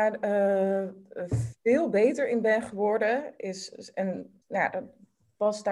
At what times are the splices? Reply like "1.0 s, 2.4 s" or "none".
4.4 s